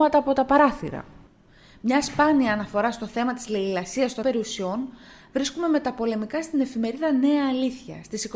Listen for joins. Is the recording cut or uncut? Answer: cut